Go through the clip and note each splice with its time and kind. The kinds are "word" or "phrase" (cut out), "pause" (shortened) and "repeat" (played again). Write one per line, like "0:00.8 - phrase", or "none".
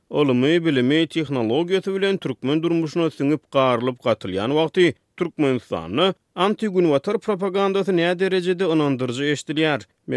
none